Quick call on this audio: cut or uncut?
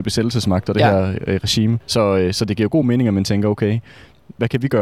uncut